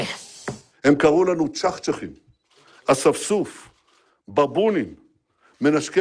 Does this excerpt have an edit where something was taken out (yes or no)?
no